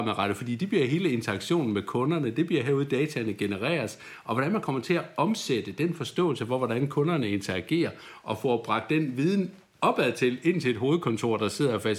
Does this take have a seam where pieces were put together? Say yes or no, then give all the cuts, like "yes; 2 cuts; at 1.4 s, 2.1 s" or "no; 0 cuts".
no; 0 cuts